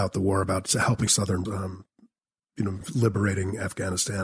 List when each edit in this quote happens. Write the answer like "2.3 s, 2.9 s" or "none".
1.1 s, 1.5 s, 2.8 s